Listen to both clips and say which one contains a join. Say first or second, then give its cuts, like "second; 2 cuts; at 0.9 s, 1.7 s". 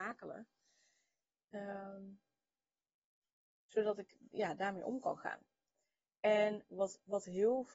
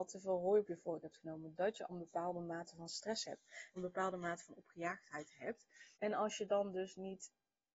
second; 3 cuts; at 1.9 s, 3.8 s, 5.9 s